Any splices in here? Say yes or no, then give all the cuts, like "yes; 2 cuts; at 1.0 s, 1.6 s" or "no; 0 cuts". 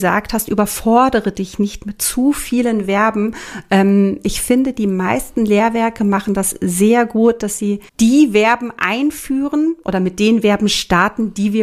yes; 1 cut; at 7.9 s